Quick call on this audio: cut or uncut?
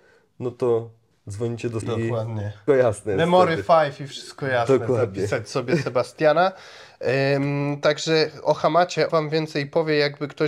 cut